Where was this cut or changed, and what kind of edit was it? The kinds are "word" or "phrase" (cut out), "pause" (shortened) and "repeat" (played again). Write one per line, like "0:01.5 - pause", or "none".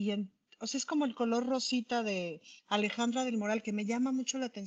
0:02.6 - pause